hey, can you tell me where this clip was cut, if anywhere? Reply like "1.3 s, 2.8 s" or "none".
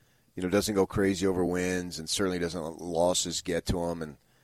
none